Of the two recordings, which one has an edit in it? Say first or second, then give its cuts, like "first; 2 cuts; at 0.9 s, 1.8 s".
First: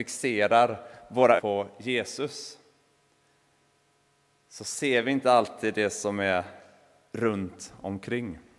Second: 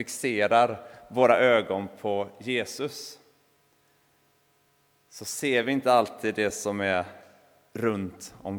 first; 1 cut; at 1.4 s